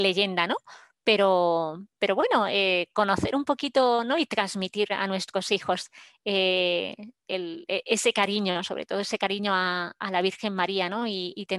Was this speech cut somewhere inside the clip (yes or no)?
no